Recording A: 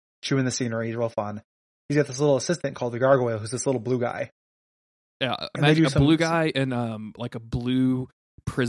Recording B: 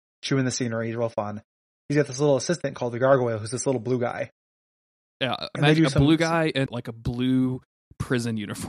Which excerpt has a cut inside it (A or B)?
B